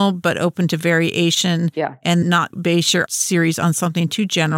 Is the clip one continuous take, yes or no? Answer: no